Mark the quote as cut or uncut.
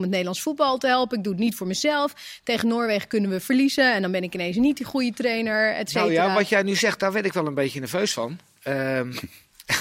uncut